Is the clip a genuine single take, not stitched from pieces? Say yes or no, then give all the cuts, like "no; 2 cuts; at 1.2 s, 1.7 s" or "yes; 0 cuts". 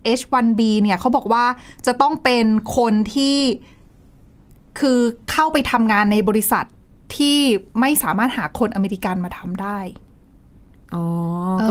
yes; 0 cuts